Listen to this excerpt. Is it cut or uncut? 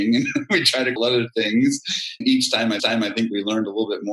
cut